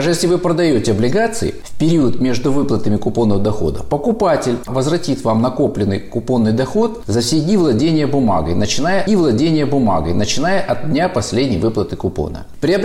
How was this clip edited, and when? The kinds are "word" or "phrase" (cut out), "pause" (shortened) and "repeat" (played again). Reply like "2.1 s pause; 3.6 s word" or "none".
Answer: 9.1 s repeat